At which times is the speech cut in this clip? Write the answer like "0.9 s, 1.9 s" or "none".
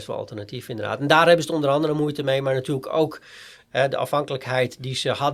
none